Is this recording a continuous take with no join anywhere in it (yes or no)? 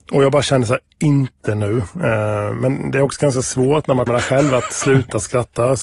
no